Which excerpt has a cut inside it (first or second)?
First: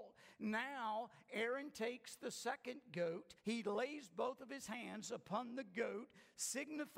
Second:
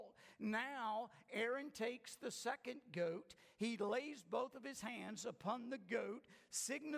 first